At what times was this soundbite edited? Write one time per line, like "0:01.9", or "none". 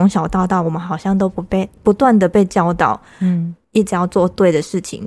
0:03.6